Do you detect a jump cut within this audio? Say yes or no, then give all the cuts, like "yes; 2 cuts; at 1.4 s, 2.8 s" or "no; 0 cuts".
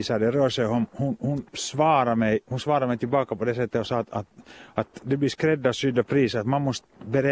no; 0 cuts